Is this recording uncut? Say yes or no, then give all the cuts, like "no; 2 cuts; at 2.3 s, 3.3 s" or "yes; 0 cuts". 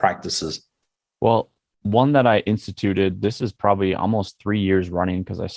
yes; 0 cuts